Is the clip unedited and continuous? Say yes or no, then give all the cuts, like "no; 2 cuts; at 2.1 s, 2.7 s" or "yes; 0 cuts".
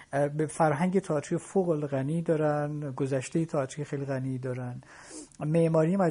yes; 0 cuts